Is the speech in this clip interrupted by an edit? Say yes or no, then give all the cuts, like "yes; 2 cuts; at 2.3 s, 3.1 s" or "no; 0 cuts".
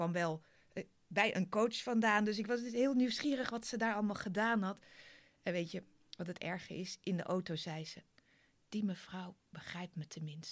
no; 0 cuts